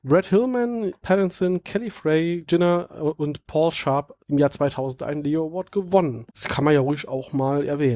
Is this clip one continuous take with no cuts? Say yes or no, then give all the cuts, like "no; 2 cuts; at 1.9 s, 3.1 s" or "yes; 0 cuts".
no; 4 cuts; at 1.0 s, 2.5 s, 4.2 s, 6.3 s